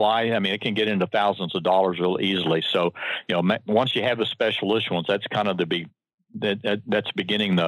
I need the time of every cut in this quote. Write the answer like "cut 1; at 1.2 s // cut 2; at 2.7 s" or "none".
none